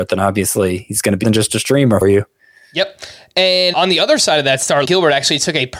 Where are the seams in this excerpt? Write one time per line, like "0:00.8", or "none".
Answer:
0:01.2
0:02.0
0:03.7
0:04.9